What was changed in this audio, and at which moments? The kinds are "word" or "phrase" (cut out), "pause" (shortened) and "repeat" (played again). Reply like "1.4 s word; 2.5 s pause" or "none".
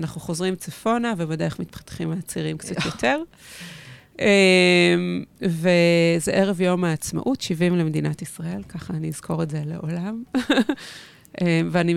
none

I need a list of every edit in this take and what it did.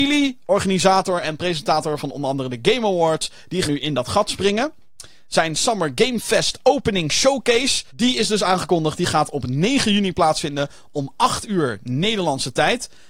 3.6 s word; 7.9 s pause

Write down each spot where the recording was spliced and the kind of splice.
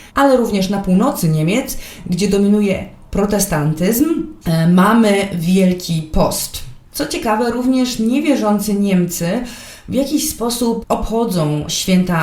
6.8 s pause; 10.8 s word

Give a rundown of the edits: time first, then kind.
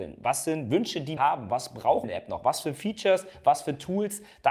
1.2 s word; 2.0 s word

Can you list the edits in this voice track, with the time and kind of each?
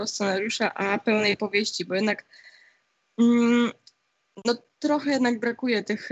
none

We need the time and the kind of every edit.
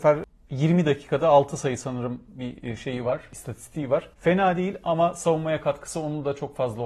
4.1 s pause

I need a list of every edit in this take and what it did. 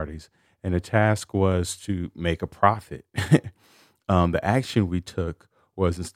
none

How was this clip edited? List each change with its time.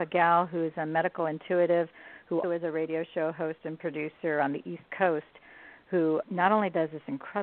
2.4 s word; 6.2 s word

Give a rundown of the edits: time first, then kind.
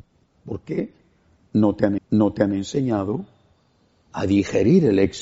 2.0 s repeat

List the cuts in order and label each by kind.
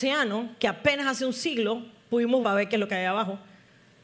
2.4 s word

